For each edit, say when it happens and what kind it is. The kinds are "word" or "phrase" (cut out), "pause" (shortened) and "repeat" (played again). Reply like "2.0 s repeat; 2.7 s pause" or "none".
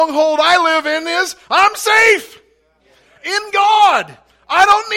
none